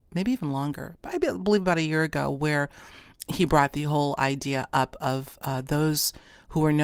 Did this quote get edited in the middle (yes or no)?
no